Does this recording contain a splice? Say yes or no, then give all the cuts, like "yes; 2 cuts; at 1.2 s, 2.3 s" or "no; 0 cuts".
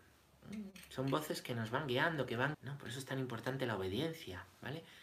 yes; 1 cut; at 2.5 s